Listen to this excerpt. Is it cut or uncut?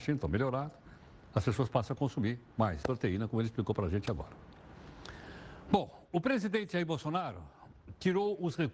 cut